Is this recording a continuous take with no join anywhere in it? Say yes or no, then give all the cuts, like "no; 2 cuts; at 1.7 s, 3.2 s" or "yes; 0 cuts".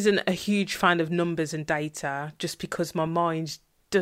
yes; 0 cuts